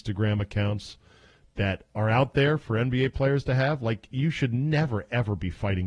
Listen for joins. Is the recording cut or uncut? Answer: uncut